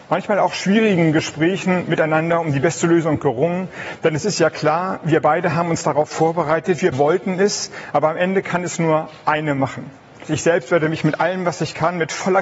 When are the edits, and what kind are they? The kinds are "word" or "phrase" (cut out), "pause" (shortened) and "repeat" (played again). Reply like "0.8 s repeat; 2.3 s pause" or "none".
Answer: 6.9 s word

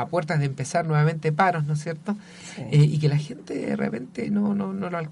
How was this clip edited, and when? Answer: none

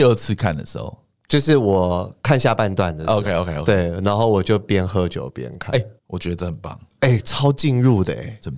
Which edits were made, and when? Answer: 3.3 s word; 6.0 s pause

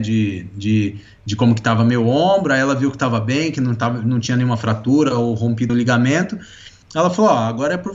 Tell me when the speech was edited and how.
5.7 s word

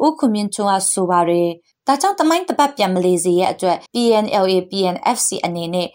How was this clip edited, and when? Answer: 3.9 s pause

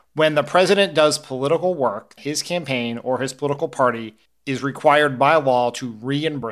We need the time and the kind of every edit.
2.2 s word; 4.3 s pause

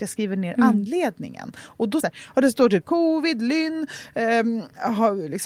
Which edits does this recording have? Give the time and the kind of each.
2.0 s phrase; 2.8 s phrase

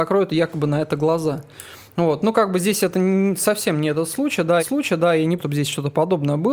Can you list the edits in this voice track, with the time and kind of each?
4.6 s repeat; 5.4 s word

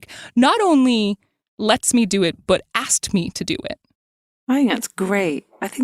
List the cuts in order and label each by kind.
none

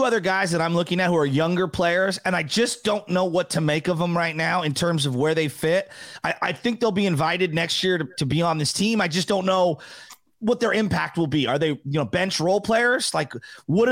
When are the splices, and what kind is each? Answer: none

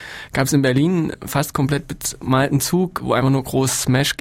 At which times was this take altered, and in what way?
none

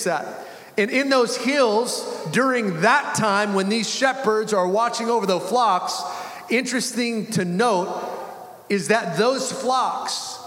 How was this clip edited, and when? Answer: none

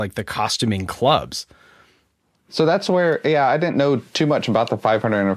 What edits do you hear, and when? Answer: none

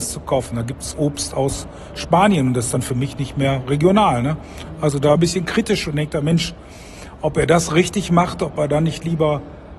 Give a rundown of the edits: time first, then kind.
5.2 s phrase

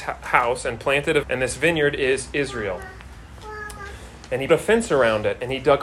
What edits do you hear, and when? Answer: 1.2 s word; 4.5 s word

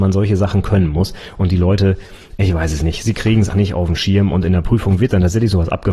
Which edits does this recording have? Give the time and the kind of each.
3.5 s word

